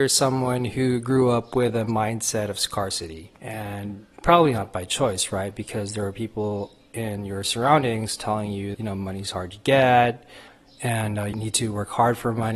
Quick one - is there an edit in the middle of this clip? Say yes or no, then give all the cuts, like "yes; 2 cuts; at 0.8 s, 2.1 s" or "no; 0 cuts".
yes; 4 cuts; at 3.4 s, 8.7 s, 10.5 s, 11.3 s